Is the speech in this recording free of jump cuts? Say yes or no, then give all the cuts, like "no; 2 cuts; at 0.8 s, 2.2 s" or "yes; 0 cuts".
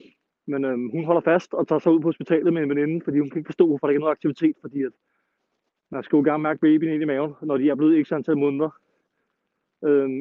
yes; 0 cuts